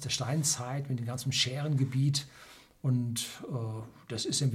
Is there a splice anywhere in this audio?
no; 0 cuts

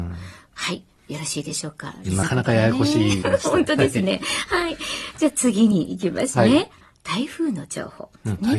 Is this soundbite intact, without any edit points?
no; 2 cuts; at 2.2 s, 3.2 s

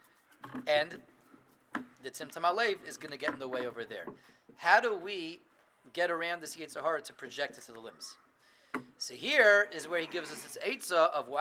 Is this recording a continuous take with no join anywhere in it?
yes; 0 cuts

